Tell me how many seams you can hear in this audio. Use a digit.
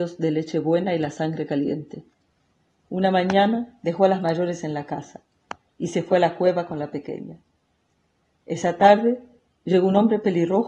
0